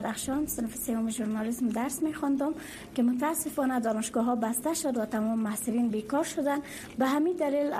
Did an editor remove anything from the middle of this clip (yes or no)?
no